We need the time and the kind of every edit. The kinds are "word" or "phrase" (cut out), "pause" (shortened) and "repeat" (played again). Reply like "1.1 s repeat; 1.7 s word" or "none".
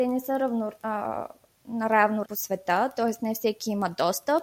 2.2 s word